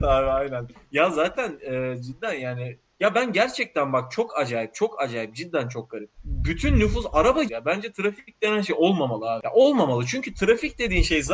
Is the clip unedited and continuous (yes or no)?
no